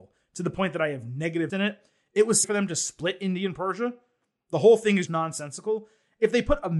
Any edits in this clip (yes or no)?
yes